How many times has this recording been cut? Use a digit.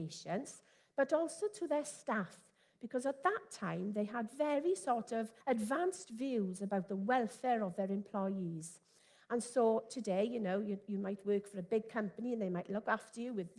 1